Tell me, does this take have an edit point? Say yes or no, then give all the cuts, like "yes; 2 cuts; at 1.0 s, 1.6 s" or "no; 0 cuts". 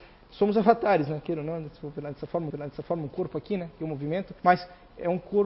yes; 2 cuts; at 2.5 s, 4.4 s